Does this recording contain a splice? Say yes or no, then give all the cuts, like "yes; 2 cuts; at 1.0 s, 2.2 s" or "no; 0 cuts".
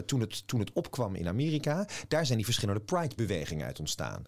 no; 0 cuts